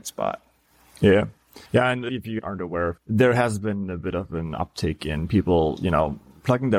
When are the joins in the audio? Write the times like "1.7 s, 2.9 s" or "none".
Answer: 1.7 s, 3.0 s